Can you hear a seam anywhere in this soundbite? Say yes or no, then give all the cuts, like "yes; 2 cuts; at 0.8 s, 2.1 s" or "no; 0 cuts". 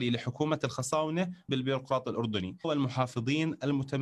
yes; 2 cuts; at 1.5 s, 2.6 s